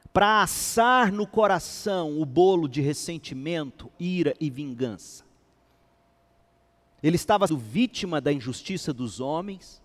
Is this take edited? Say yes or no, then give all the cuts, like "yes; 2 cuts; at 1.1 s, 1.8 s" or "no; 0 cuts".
yes; 2 cuts; at 3.9 s, 7.5 s